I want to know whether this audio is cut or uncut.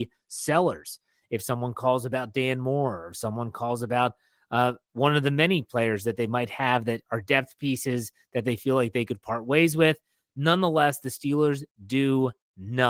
uncut